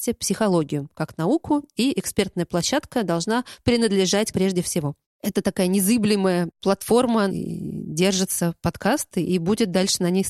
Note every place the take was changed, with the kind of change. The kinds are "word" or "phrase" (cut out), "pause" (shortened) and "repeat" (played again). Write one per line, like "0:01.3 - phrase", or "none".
0:04.3 - phrase
0:07.3 - phrase